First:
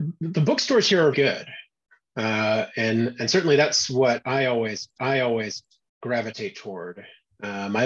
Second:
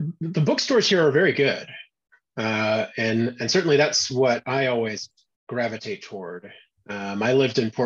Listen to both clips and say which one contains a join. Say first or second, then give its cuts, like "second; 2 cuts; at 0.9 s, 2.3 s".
first; 2 cuts; at 1.1 s, 5.0 s